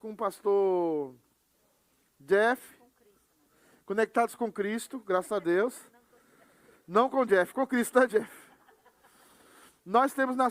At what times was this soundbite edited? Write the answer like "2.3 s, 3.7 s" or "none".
none